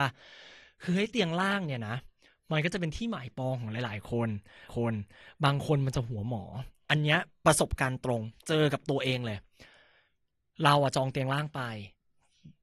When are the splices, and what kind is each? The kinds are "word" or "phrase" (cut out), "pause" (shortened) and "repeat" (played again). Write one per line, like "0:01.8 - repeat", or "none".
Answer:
0:04.7 - repeat